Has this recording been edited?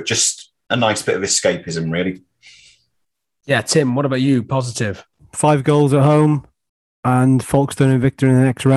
no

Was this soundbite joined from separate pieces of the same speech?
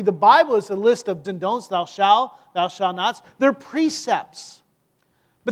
yes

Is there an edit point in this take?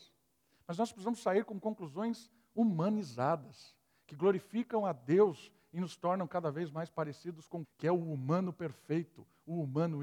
yes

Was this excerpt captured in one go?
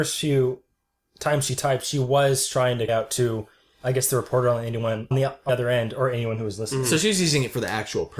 no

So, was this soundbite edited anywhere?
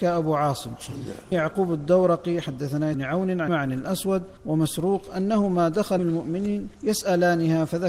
yes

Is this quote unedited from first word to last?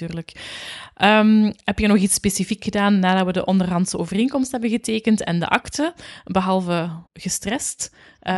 no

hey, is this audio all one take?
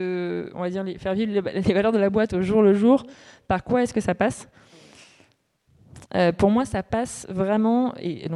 yes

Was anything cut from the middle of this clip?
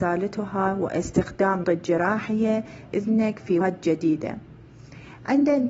yes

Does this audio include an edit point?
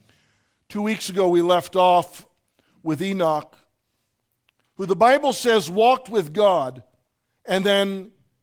no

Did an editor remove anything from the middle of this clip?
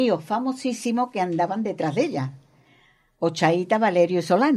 no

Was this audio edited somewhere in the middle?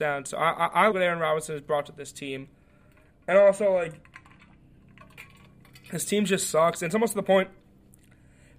yes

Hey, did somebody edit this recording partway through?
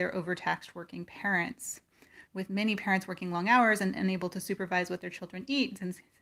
yes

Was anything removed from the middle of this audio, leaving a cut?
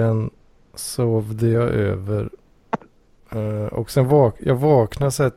no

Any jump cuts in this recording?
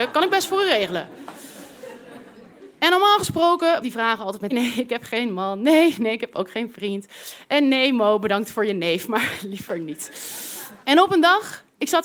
yes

